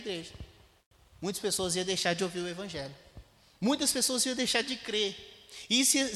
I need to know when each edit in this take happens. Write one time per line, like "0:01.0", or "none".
none